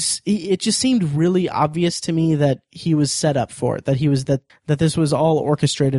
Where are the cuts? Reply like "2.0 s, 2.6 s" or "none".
4.5 s